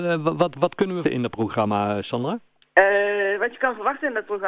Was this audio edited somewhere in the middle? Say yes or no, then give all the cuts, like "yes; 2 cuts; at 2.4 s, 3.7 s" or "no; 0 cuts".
yes; 2 cuts; at 1.0 s, 2.6 s